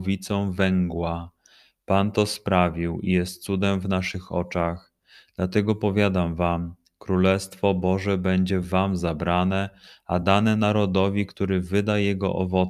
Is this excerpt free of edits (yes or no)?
yes